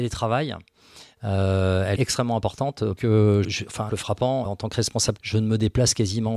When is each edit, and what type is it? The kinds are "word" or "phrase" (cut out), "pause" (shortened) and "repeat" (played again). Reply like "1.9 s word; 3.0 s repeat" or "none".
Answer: 2.0 s word; 3.0 s word; 3.4 s word; 3.9 s word; 4.5 s word; 5.2 s word